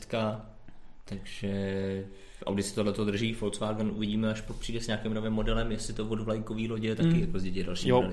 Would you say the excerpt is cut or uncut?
uncut